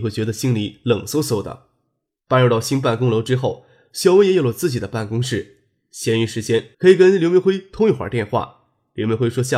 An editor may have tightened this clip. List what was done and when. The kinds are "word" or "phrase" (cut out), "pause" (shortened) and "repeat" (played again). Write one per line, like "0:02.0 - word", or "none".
0:06.7 - pause